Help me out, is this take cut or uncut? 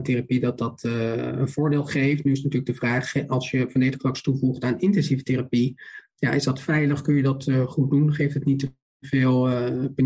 uncut